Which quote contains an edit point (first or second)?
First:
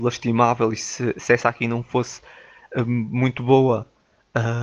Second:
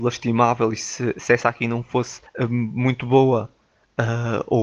second